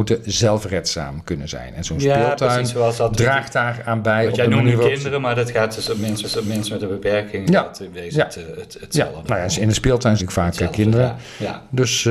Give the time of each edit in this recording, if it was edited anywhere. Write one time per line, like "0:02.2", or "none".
0:06.2
0:10.2